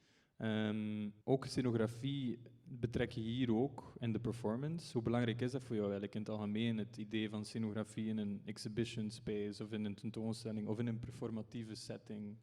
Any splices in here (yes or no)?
yes